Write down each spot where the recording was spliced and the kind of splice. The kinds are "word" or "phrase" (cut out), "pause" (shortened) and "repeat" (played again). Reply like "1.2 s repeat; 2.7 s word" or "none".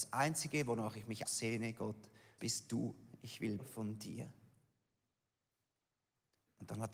1.3 s word; 2.4 s word; 3.6 s word